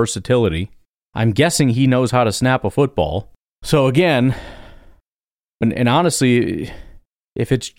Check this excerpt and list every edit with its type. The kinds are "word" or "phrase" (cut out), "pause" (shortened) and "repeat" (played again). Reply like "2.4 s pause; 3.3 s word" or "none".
5.6 s word